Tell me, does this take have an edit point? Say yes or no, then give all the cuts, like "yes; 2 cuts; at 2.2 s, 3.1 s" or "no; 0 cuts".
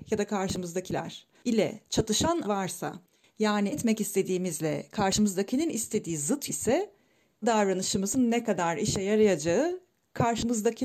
yes; 4 cuts; at 2.4 s, 3.7 s, 6.5 s, 7.4 s